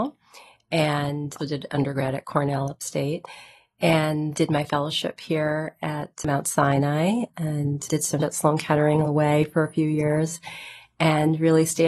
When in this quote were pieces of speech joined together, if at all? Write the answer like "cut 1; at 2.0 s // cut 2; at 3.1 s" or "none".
cut 1; at 1.4 s // cut 2; at 4.3 s // cut 3; at 8.2 s // cut 4; at 9.0 s